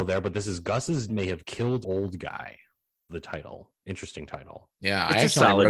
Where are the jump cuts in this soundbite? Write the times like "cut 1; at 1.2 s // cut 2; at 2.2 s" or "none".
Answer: cut 1; at 1.1 s // cut 2; at 1.8 s // cut 3; at 3.1 s // cut 4; at 3.8 s // cut 5; at 4.7 s